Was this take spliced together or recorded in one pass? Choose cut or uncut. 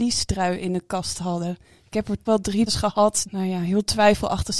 cut